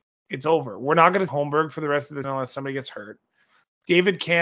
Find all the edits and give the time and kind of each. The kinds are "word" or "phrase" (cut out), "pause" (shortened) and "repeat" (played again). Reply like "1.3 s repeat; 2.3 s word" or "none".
1.3 s word; 2.2 s word